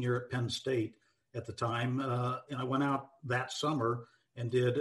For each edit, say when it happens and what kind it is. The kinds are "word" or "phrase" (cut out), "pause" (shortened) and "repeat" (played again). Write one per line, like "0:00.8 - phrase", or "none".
none